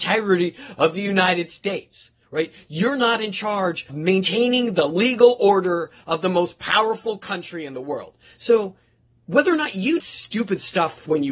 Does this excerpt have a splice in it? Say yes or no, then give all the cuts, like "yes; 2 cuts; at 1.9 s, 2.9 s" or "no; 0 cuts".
yes; 2 cuts; at 3.9 s, 10.0 s